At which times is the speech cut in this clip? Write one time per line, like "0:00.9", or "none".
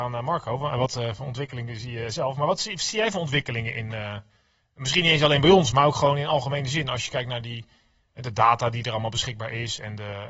none